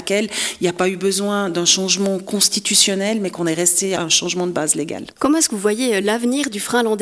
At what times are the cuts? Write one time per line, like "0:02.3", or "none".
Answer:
none